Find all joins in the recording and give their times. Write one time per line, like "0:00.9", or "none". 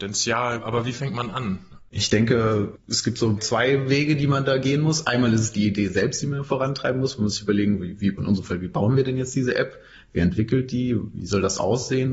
0:08.2